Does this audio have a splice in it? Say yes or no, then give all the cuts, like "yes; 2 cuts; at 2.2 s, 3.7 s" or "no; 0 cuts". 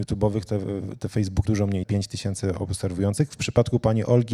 yes; 2 cuts; at 1.4 s, 1.8 s